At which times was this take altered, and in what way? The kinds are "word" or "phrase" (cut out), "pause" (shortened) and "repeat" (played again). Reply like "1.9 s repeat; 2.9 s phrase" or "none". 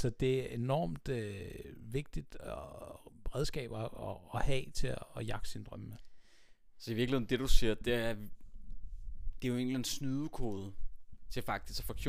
none